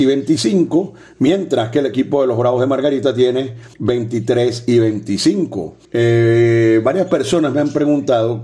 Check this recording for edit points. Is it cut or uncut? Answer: cut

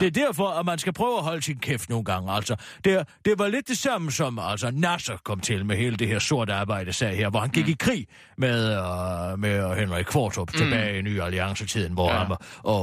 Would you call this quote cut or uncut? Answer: uncut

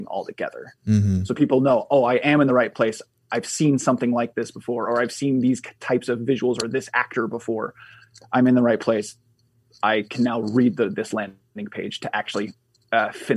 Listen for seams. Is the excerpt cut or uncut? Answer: uncut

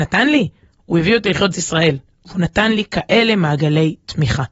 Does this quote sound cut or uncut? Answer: cut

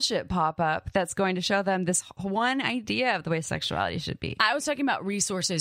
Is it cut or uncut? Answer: uncut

